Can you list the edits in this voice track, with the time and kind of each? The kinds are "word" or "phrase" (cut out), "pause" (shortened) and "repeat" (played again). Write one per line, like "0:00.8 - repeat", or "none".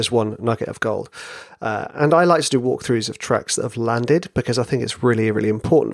none